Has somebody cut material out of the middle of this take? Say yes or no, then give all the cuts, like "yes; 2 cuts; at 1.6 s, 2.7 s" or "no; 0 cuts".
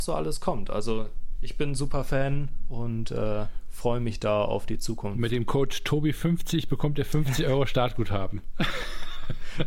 no; 0 cuts